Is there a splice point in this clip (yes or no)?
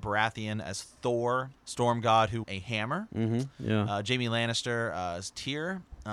yes